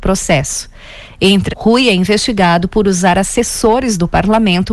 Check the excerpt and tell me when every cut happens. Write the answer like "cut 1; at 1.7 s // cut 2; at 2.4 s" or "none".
cut 1; at 1.5 s